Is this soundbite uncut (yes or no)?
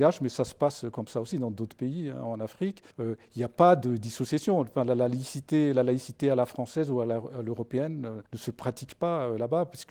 no